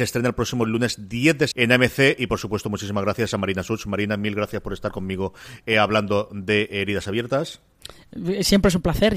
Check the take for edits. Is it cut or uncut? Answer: cut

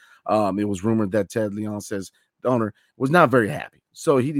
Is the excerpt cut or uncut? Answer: uncut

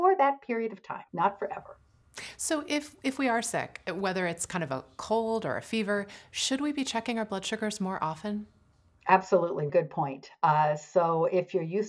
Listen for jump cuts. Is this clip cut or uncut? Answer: cut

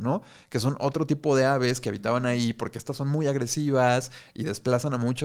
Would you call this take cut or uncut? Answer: uncut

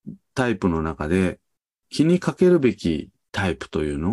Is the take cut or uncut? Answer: uncut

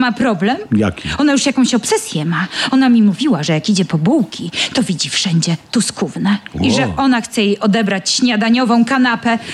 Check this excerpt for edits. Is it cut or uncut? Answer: uncut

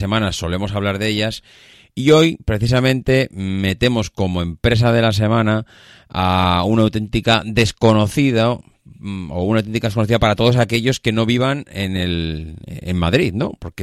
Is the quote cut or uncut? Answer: uncut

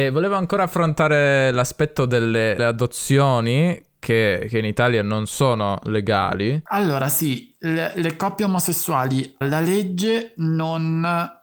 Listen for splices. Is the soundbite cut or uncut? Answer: cut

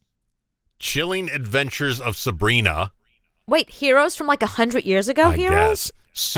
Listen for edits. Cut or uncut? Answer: uncut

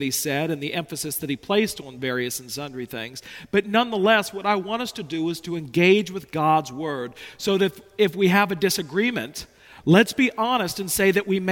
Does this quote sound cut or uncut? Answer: uncut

